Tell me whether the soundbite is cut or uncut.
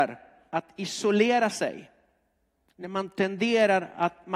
uncut